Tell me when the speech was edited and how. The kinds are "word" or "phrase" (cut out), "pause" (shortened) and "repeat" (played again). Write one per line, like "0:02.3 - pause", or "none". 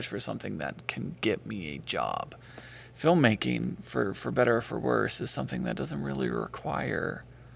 none